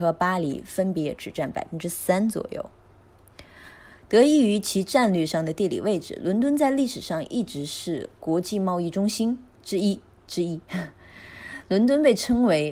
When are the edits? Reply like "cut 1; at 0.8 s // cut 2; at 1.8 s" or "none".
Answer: none